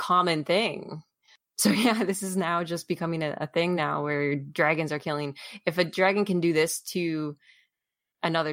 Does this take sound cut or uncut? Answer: uncut